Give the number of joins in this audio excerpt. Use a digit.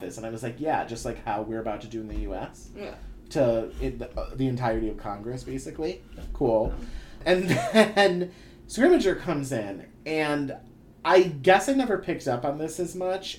0